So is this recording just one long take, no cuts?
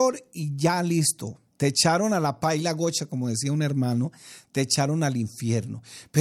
no; 1 cut; at 1.5 s

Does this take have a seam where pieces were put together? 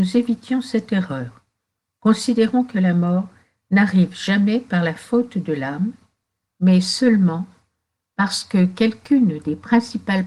no; 0 cuts

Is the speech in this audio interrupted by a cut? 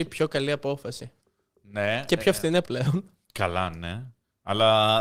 yes; 1 cut; at 2.6 s

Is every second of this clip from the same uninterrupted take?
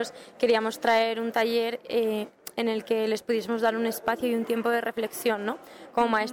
yes; 0 cuts

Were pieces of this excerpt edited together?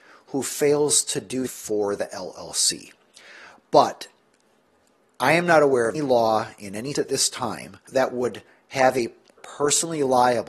yes; 4 cuts; at 1.5 s, 5.9 s, 6.9 s, 9.4 s

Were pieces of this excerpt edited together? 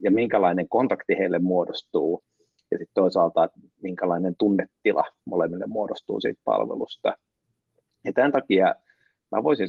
no; 0 cuts

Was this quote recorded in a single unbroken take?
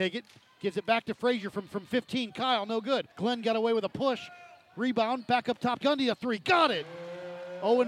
no; 3 cuts; at 1.7 s, 3.1 s, 5.8 s

